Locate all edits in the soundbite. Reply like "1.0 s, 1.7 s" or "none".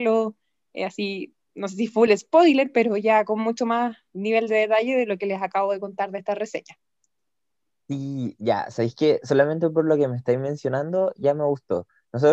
none